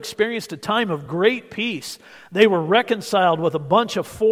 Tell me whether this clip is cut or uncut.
uncut